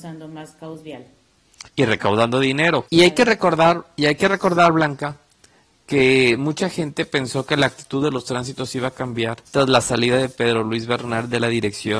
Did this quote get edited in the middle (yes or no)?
yes